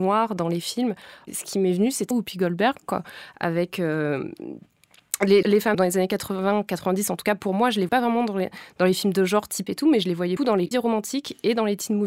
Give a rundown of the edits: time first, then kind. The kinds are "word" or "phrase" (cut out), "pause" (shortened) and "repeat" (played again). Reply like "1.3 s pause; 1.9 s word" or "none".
2.1 s word; 5.4 s word; 5.7 s word; 7.9 s word; 9.7 s word; 10.4 s word; 10.7 s word